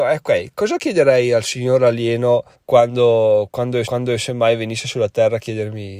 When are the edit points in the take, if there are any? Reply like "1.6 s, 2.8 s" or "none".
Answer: 2.5 s, 3.8 s